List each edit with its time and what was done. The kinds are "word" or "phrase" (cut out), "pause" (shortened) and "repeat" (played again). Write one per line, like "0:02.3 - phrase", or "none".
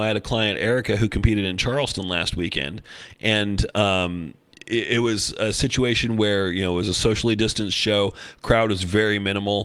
none